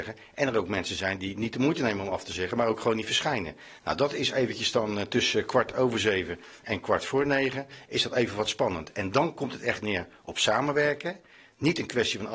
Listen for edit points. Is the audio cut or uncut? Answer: uncut